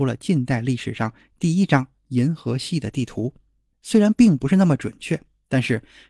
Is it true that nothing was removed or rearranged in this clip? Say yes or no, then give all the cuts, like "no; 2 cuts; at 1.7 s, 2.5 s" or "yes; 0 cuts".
yes; 0 cuts